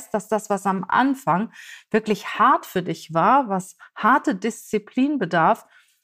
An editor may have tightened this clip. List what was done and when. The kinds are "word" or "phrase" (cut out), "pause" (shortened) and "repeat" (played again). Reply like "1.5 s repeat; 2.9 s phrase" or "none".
none